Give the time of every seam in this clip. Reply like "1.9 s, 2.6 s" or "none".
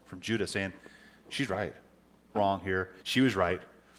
2.3 s, 3.0 s

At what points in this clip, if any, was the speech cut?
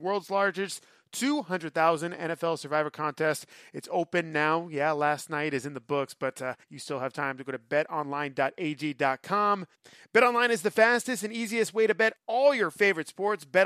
6.6 s, 9.7 s, 12.2 s

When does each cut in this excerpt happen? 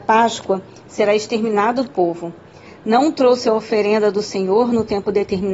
1.9 s

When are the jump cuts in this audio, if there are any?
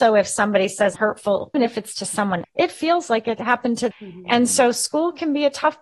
0.9 s, 1.5 s, 2.4 s, 3.9 s

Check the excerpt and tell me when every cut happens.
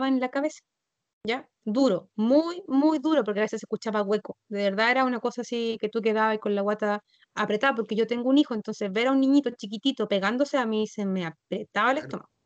1.5 s, 7.1 s

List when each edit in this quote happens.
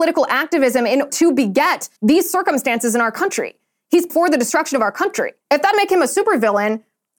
1.1 s, 2.0 s, 4.1 s, 5.4 s, 5.7 s

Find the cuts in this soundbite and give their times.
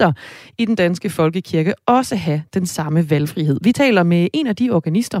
none

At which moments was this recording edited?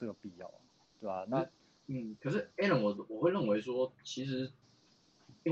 none

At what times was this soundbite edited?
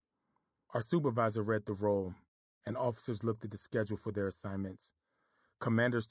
none

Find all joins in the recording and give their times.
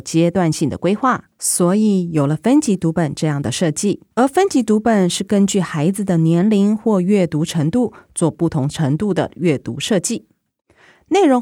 1.3 s, 4.1 s

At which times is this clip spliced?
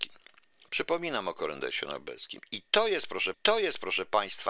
3.3 s

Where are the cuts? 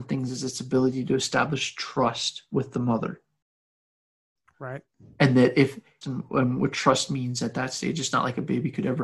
6.0 s

